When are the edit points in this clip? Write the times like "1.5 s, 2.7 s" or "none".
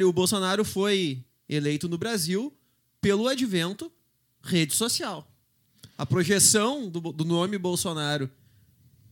none